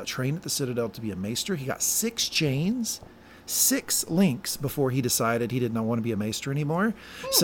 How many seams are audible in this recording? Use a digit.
0